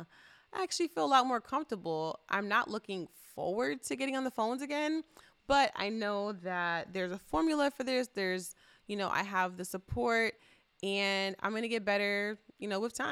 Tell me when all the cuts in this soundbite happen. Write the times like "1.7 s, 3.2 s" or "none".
none

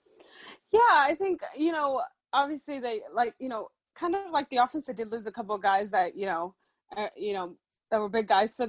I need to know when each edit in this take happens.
none

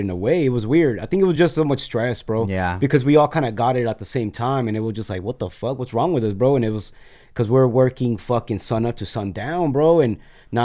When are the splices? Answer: none

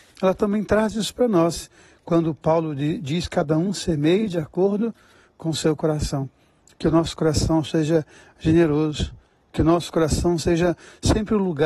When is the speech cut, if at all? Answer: none

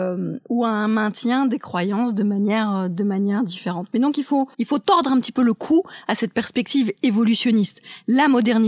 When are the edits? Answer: 4.5 s

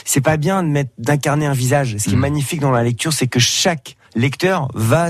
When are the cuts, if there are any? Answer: 4.1 s

